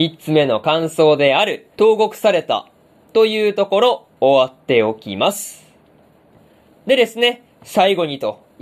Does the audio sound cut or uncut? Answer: cut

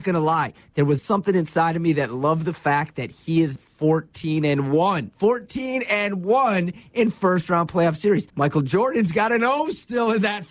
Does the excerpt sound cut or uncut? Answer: cut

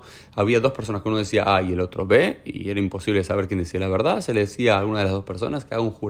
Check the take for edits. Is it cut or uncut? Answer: uncut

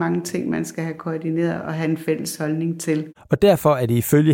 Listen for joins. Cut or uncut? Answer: uncut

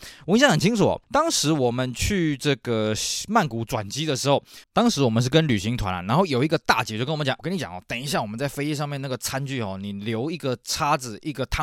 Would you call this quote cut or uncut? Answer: cut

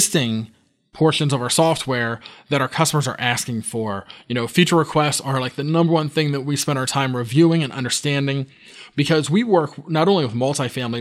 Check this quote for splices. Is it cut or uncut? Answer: uncut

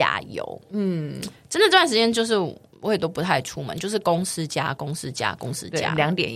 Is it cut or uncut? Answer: uncut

